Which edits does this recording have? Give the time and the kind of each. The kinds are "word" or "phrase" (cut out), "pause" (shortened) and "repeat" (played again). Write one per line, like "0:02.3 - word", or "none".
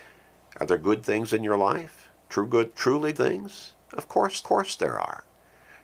0:03.1 - word
0:04.4 - repeat

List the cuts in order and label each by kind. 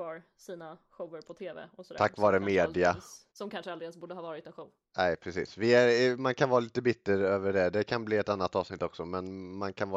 0:03.3 - pause

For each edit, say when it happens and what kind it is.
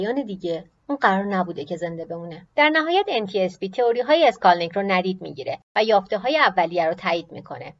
0:02.5 - pause
0:05.6 - pause

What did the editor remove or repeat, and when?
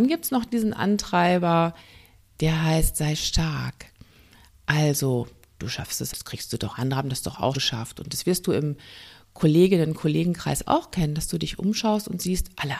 0:06.1 - word
0:06.7 - word
0:07.5 - word

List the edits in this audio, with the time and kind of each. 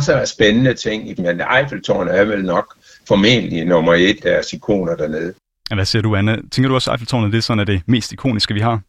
0:01.2 - word
0:04.2 - word

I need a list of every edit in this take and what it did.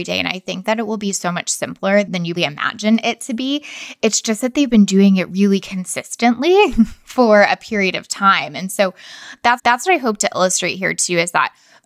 0:02.4 - word
0:09.6 - repeat

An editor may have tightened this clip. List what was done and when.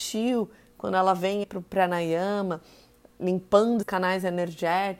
0:01.4 - word
0:03.8 - word

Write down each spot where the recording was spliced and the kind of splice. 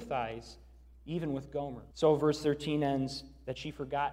0:01.9 - pause

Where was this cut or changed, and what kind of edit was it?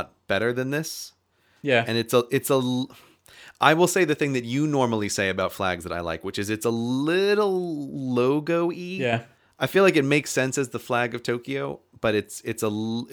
none

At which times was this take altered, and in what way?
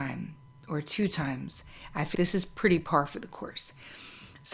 0:02.1 - word

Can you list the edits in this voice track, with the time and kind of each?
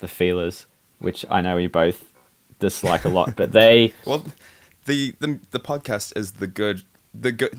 none

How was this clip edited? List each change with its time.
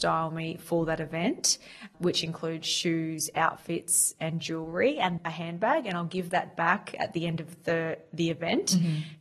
0:01.9 - word
0:05.2 - word

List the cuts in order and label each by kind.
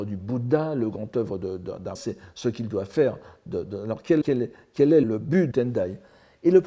0:02.0 - word
0:03.7 - word
0:04.2 - word
0:05.0 - word
0:05.5 - word

